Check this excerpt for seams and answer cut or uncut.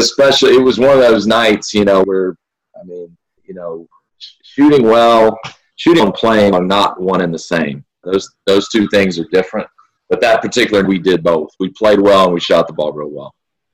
cut